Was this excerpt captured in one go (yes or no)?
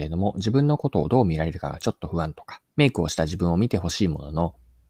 no